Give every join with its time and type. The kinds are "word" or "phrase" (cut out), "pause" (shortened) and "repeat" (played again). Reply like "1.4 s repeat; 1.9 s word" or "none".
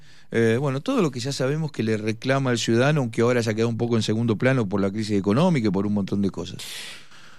none